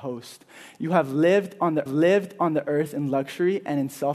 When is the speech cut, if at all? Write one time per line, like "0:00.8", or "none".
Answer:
0:01.9